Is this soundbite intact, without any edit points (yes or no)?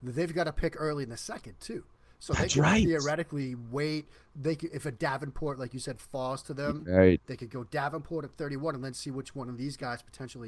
yes